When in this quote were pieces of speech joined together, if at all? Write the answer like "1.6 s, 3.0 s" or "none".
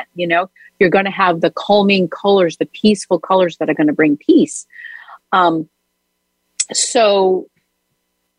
none